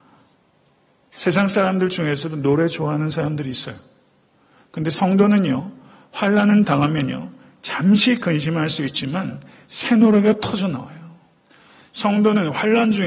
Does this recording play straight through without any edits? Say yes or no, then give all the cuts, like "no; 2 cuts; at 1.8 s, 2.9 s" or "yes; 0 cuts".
yes; 0 cuts